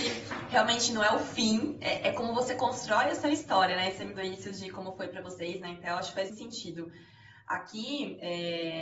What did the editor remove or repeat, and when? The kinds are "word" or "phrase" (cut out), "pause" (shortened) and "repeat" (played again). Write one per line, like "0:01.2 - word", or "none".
0:04.2 - word
0:06.3 - word